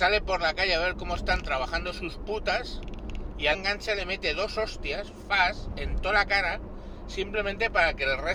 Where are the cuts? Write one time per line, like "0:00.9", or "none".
0:03.5
0:05.2